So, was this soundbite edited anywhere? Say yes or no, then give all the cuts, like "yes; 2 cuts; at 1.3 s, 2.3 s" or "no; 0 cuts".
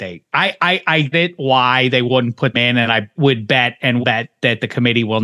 yes; 4 cuts; at 1.1 s, 2.5 s, 3.2 s, 4.0 s